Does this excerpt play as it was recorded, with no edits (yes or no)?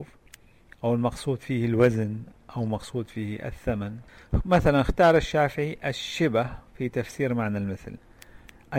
yes